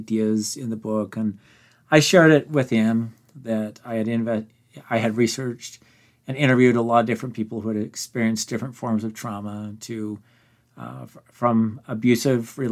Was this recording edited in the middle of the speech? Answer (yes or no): no